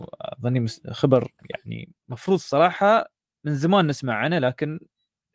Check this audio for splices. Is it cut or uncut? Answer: uncut